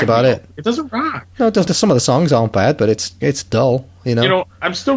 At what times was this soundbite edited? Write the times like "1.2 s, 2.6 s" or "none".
1.7 s, 3.2 s